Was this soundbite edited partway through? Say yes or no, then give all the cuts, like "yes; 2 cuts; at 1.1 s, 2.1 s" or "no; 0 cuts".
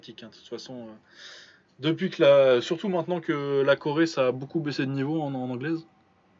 no; 0 cuts